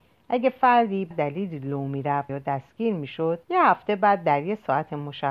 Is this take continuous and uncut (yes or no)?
no